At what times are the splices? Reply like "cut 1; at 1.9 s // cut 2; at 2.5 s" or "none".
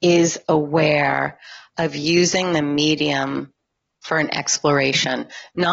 none